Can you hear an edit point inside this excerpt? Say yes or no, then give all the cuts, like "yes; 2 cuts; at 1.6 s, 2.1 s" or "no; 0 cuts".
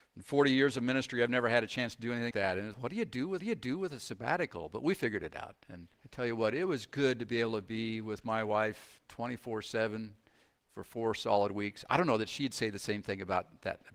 yes; 4 cuts; at 2.3 s, 2.7 s, 3.4 s, 5.9 s